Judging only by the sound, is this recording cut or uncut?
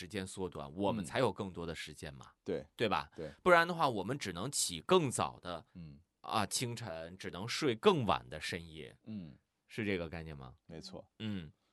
cut